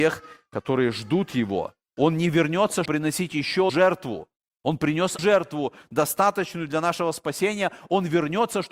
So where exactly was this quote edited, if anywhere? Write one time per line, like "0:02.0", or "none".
0:02.9
0:03.7
0:05.2